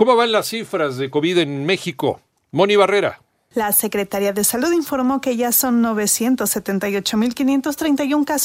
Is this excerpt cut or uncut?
uncut